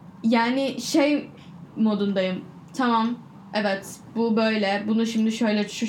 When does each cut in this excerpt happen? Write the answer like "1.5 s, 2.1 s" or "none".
none